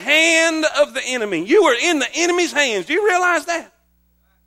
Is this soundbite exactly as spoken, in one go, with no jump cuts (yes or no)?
yes